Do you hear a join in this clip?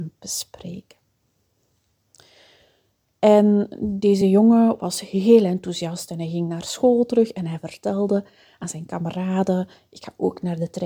no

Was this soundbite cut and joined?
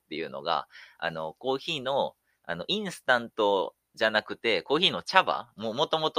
no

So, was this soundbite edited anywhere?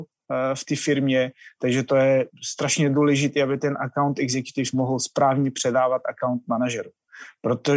no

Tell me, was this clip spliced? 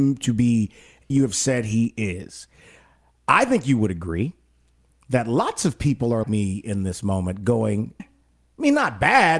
yes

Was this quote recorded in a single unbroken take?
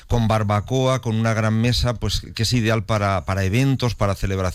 yes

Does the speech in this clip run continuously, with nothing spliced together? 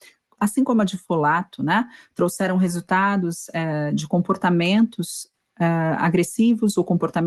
yes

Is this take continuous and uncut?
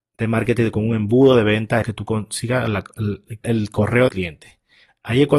no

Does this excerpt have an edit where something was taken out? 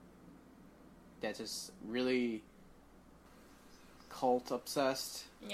no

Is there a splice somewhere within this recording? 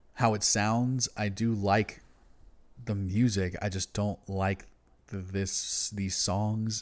no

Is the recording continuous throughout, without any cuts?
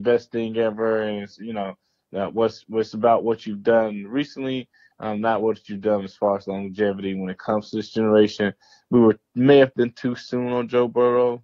yes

